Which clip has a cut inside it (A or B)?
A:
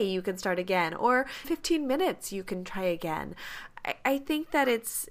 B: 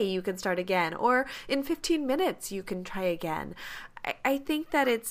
A